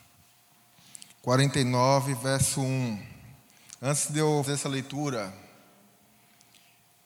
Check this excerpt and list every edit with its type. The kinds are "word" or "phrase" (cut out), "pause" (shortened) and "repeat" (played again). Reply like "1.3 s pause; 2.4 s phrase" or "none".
1.1 s pause; 4.4 s word